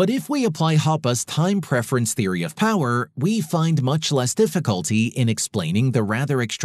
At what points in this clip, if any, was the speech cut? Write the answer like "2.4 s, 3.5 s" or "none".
none